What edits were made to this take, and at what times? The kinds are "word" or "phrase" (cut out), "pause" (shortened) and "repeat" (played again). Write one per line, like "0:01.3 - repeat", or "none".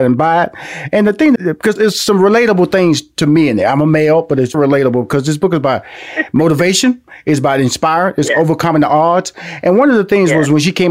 0:01.4 - word
0:01.8 - word
0:04.5 - word